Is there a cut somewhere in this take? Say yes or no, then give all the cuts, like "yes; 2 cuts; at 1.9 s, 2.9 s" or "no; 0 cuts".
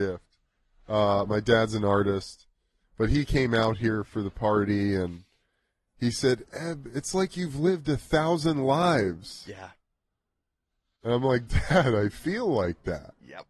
no; 0 cuts